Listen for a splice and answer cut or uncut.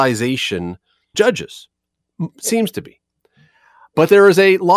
cut